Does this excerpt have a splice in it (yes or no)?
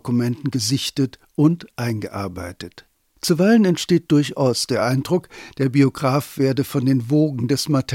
no